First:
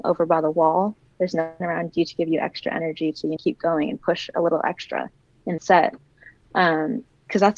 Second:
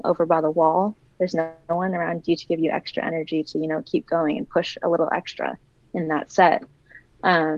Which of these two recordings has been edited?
first; 3 cuts; at 1.6 s, 3.4 s, 5.6 s

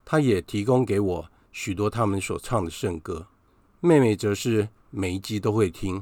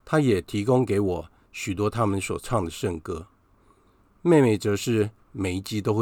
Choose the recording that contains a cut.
first; 1 cut; at 3.5 s

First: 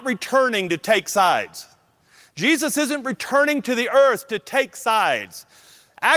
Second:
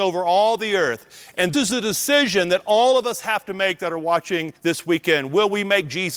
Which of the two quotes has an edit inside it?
second; 2 cuts; at 1.5 s, 4.6 s

